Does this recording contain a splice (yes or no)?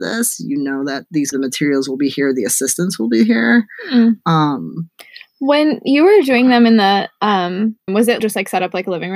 yes